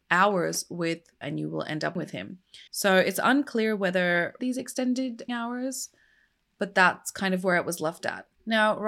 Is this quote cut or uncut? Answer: cut